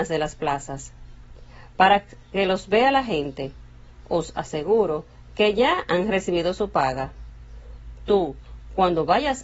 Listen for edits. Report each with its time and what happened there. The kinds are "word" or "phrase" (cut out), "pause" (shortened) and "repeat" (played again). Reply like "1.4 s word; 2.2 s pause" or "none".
none